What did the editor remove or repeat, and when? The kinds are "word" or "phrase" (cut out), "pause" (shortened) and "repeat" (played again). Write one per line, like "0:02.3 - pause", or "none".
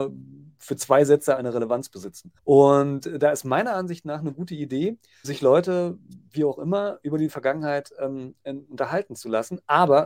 0:01.4 - word
0:02.4 - pause
0:05.2 - word